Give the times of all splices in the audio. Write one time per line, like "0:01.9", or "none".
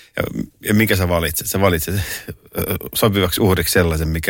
none